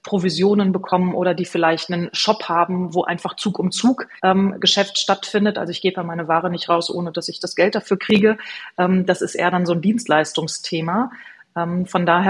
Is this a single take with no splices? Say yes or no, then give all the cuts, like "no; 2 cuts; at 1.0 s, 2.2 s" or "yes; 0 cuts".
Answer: no; 1 cut; at 4.2 s